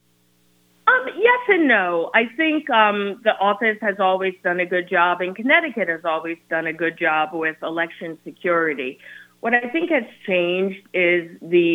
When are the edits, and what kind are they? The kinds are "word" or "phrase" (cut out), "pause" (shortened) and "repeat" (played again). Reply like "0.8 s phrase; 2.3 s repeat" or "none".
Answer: none